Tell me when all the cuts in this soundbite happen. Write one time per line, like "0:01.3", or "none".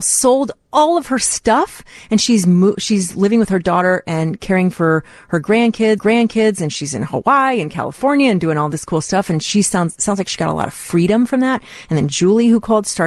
0:06.0